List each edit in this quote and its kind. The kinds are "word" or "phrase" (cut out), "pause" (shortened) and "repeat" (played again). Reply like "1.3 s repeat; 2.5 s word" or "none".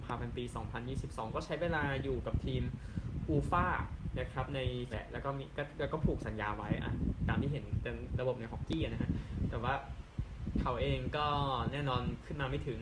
4.9 s word